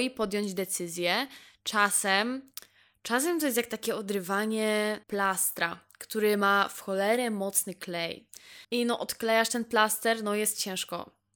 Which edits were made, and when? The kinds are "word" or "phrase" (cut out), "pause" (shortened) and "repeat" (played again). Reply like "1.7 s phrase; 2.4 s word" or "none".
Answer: 5.0 s pause; 8.6 s pause